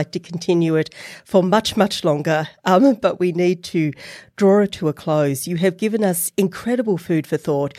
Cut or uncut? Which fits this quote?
uncut